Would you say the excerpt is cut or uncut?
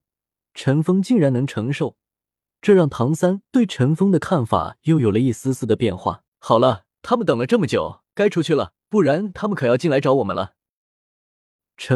cut